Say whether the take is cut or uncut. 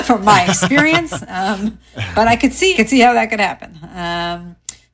cut